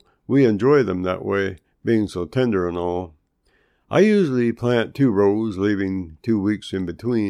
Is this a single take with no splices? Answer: yes; 0 cuts

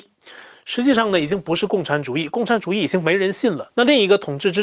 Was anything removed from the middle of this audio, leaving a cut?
no; 0 cuts

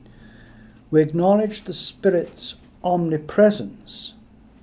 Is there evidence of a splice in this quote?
no; 0 cuts

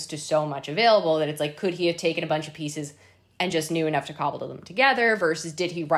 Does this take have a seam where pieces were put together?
no; 0 cuts

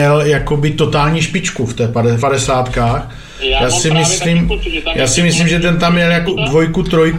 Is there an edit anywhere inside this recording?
yes; 2 cuts; at 2.2 s, 6.3 s

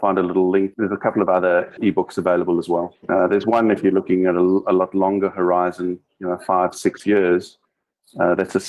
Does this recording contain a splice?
yes; 1 cut; at 1.8 s

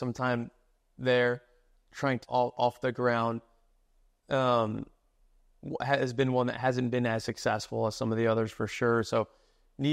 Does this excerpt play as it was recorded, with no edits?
no; 1 cut; at 2.2 s

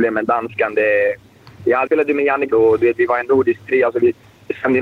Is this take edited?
yes; 3 cuts; at 1.9 s, 2.5 s, 3.2 s

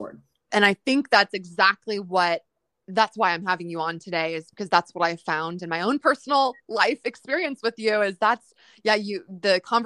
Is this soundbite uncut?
yes; 0 cuts

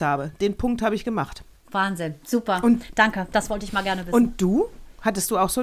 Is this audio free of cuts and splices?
yes; 0 cuts

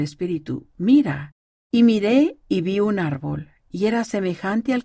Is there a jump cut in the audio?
yes; 1 cut; at 1.4 s

